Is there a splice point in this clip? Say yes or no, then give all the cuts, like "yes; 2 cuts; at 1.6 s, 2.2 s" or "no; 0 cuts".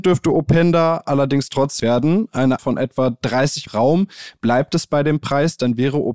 yes; 3 cuts; at 1.8 s, 2.6 s, 3.7 s